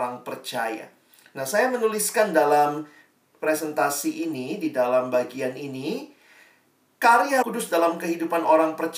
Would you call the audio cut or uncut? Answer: cut